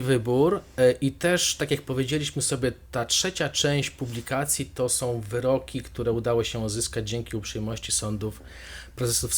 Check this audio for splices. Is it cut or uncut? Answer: uncut